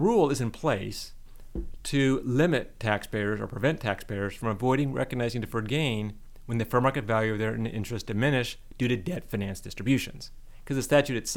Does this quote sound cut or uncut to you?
uncut